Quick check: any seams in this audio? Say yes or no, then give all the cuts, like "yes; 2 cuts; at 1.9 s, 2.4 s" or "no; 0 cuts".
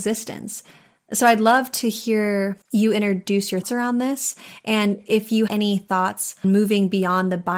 yes; 4 cuts; at 2.6 s, 3.6 s, 5.5 s, 6.4 s